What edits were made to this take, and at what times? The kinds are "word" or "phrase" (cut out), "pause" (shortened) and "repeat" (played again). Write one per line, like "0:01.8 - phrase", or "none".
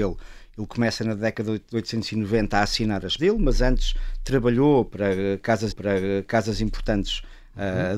0:03.2 - word
0:05.7 - repeat